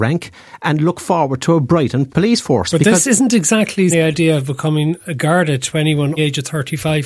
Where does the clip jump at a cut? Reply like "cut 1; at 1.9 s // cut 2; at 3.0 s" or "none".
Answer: cut 1; at 2.1 s // cut 2; at 3.9 s // cut 3; at 6.2 s